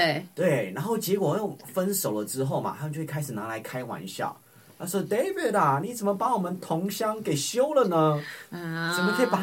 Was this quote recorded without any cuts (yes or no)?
yes